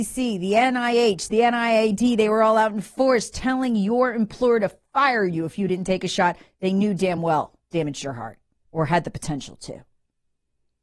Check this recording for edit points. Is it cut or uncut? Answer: uncut